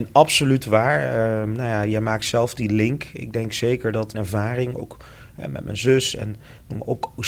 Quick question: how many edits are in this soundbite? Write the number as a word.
one